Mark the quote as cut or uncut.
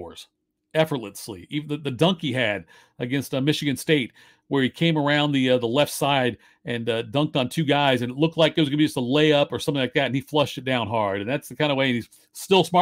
uncut